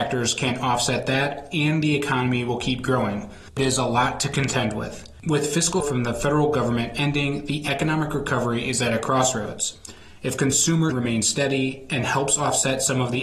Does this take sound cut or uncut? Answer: cut